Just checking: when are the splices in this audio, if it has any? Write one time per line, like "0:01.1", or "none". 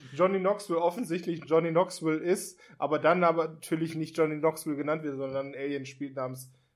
none